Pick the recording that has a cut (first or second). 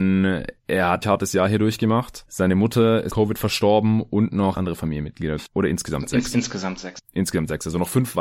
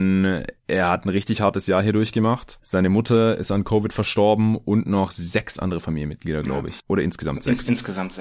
first